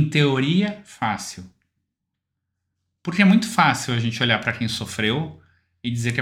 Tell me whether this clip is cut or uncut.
uncut